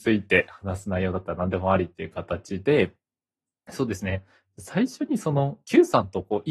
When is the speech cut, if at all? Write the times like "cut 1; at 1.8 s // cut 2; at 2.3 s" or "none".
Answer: none